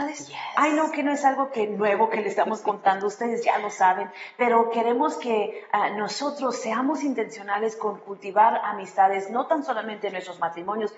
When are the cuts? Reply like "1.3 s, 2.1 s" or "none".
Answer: none